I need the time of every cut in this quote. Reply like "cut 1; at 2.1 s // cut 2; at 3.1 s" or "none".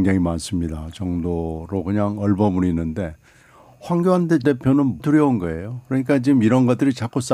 cut 1; at 4.4 s // cut 2; at 5.0 s